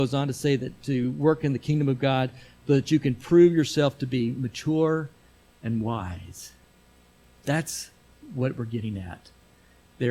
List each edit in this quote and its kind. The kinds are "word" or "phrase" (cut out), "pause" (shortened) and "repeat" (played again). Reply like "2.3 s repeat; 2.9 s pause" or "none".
none